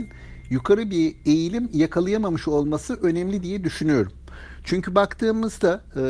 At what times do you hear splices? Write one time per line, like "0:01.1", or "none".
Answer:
none